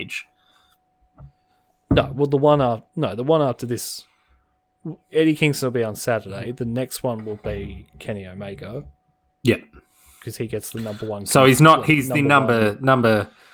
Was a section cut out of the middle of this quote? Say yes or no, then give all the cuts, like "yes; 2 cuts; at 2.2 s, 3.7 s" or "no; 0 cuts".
no; 0 cuts